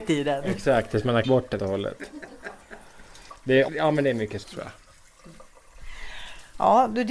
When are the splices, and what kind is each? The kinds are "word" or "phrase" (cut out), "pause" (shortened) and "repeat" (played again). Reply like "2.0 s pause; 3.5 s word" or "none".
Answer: 1.2 s word; 1.6 s word; 3.7 s word; 4.4 s word